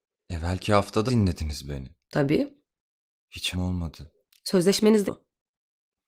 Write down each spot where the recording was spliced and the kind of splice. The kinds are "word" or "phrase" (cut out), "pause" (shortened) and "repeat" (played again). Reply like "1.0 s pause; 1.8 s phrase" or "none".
1.1 s word; 3.5 s word; 5.1 s word